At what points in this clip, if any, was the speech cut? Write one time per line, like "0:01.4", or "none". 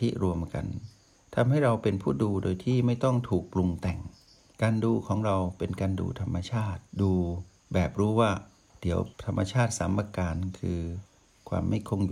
0:06.9
0:08.7
0:09.1